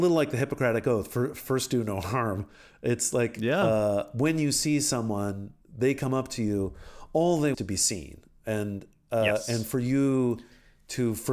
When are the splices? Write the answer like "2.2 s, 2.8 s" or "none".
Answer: 5.6 s, 7.5 s